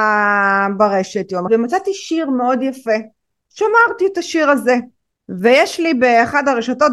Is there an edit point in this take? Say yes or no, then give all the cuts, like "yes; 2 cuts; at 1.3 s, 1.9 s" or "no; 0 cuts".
yes; 2 cuts; at 1.5 s, 5.1 s